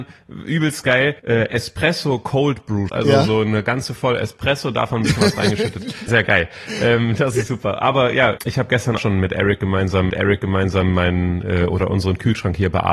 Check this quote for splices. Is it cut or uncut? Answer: cut